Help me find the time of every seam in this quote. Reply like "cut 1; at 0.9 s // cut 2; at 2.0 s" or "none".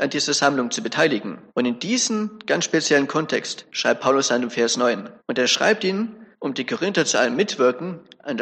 cut 1; at 1.5 s // cut 2; at 5.2 s // cut 3; at 6.3 s